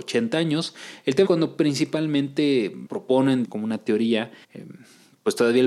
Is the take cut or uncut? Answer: cut